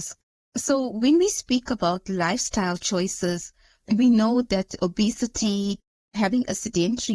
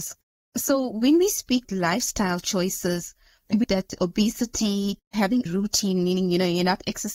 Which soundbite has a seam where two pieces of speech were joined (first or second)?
second